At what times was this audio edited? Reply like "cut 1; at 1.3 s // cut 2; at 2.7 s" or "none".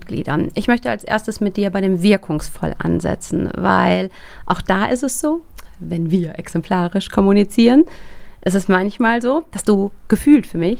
none

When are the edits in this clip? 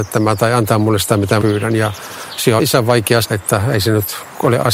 cut 1; at 1.4 s // cut 2; at 2.6 s // cut 3; at 3.2 s

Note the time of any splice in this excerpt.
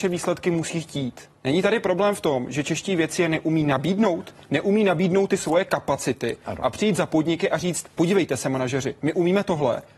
cut 1; at 1.3 s // cut 2; at 7.9 s

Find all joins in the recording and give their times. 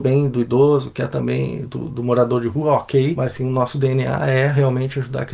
cut 1; at 1.7 s

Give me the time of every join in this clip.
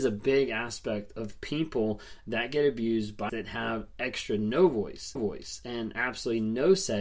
cut 1; at 3.3 s // cut 2; at 5.2 s

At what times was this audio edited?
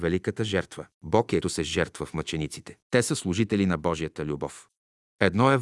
cut 1; at 0.9 s // cut 2; at 1.4 s // cut 3; at 2.8 s

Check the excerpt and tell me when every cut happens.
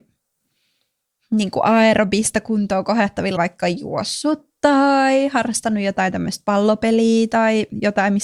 cut 1; at 3.4 s

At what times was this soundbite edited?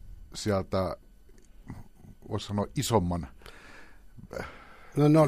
none

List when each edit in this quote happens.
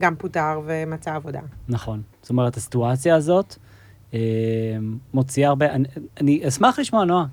cut 1; at 2.1 s // cut 2; at 6.1 s

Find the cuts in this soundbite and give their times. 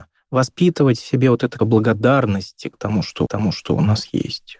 cut 1; at 1.6 s // cut 2; at 3.3 s

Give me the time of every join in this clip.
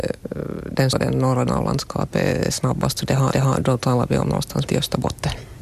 cut 1; at 0.9 s // cut 2; at 1.5 s // cut 3; at 3.3 s // cut 4; at 4.7 s

